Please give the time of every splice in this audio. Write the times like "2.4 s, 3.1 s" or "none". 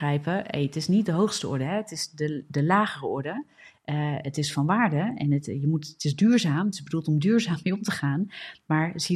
none